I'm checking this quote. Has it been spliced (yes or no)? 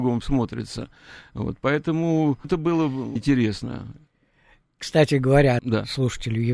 yes